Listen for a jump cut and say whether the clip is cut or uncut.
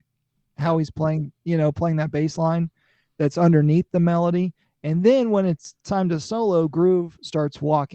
uncut